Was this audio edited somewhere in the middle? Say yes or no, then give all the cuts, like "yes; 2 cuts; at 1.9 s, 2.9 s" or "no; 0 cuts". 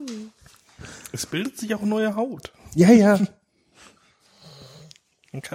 no; 0 cuts